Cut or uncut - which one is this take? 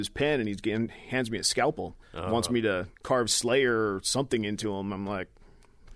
cut